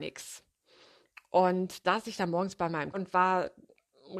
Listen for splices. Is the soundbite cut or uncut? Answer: cut